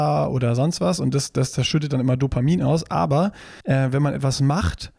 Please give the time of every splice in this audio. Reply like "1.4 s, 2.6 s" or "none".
3.6 s